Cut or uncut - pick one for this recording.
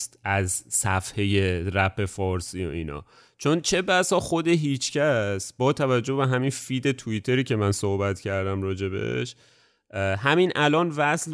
uncut